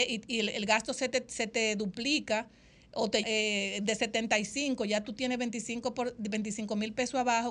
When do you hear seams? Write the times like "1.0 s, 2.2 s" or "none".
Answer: 3.2 s

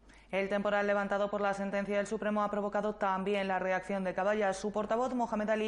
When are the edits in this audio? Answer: none

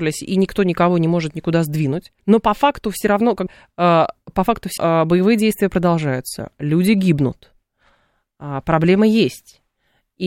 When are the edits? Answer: 2.2 s, 3.5 s, 4.8 s

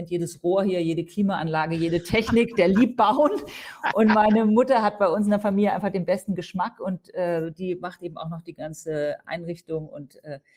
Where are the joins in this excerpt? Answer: none

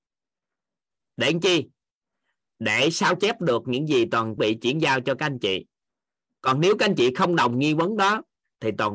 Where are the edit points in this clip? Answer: 4.4 s

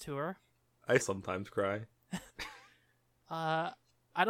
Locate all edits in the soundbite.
1.0 s, 2.3 s

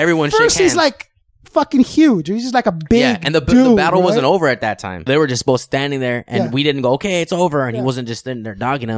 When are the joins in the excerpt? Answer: 5.1 s

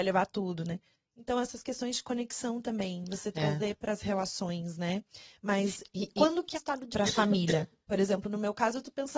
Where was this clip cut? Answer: 6.5 s, 6.9 s

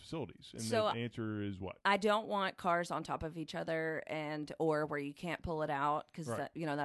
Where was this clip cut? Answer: 1.8 s

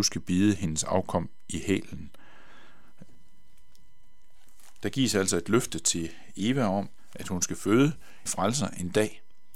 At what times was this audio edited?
8.3 s

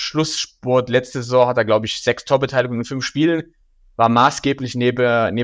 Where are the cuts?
none

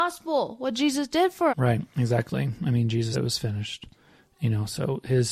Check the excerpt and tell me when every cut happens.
1.5 s, 3.1 s

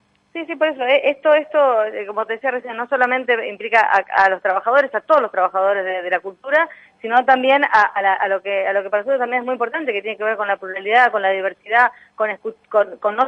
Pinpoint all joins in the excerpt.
none

